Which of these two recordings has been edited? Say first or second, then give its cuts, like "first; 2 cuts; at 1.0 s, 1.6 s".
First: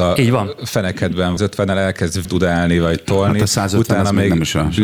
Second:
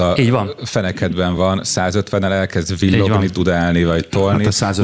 first; 2 cuts; at 1.4 s, 2.2 s